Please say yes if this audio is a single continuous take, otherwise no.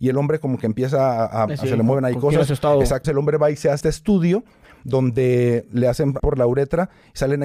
no